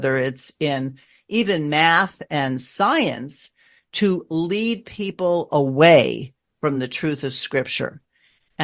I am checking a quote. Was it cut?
no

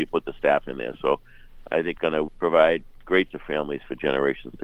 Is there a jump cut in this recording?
yes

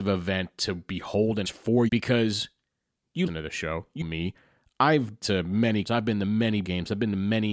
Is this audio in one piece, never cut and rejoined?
no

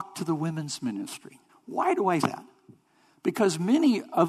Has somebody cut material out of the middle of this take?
yes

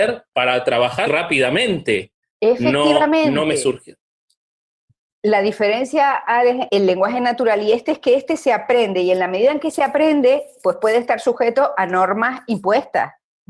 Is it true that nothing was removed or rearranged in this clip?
no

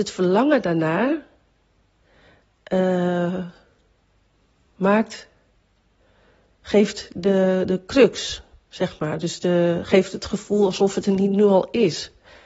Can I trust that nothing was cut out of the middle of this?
yes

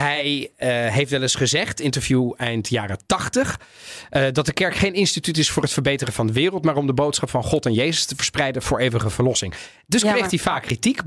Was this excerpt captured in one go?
yes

